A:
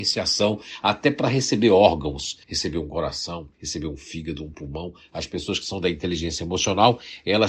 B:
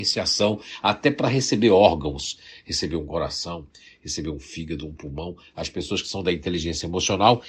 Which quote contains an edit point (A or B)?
A